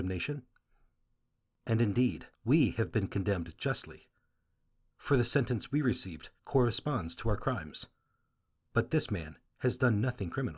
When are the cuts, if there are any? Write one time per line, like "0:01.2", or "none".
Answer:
0:02.3
0:06.4